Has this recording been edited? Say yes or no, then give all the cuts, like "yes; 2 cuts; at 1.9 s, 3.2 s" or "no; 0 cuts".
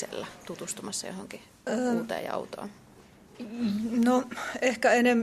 no; 0 cuts